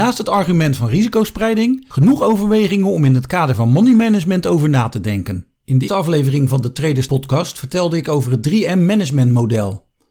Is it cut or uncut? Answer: cut